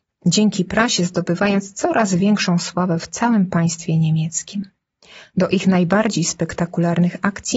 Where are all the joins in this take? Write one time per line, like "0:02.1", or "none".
none